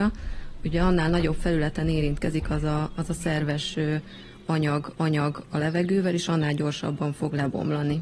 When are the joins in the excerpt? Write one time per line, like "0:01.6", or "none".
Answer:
0:05.0